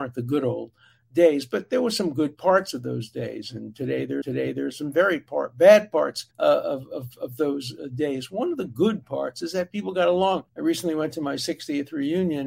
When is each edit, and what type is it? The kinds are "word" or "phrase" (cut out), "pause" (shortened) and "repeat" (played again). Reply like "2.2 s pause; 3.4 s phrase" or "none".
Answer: 4.2 s repeat; 6.3 s pause; 10.5 s pause